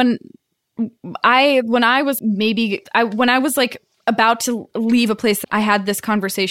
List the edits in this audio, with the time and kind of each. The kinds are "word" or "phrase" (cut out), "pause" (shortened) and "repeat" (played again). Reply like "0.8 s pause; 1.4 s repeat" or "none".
2.2 s word; 2.8 s pause; 3.9 s pause; 5.4 s phrase